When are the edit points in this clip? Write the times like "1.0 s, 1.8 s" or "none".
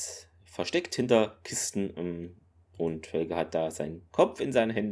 none